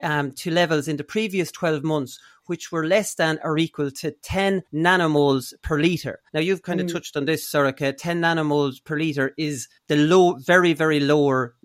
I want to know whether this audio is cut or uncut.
cut